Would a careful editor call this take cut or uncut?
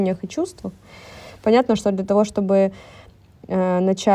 uncut